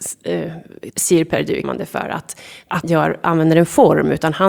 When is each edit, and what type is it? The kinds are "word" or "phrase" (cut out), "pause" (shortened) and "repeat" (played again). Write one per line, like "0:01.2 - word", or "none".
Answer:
0:01.6 - word
0:02.8 - word